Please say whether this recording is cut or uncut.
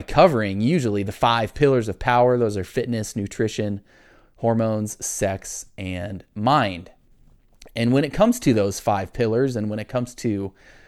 uncut